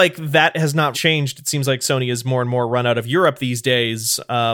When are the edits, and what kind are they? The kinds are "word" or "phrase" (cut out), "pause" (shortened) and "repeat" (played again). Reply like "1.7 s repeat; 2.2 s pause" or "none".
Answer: 0.9 s word